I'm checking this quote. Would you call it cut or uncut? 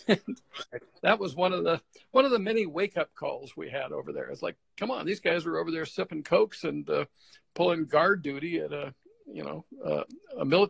uncut